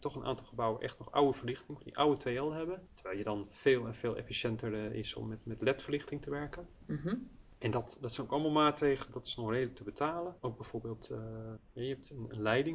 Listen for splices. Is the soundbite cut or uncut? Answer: cut